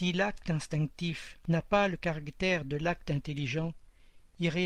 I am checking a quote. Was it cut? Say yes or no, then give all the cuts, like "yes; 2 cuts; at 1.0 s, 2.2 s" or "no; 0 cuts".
no; 0 cuts